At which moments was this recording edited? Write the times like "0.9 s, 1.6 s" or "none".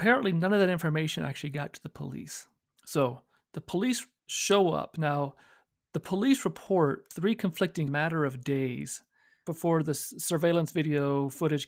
7.9 s